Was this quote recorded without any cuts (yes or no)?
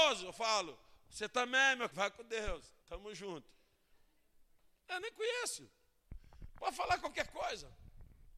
no